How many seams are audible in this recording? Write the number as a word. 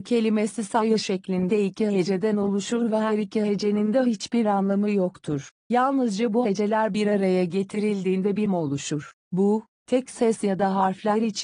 one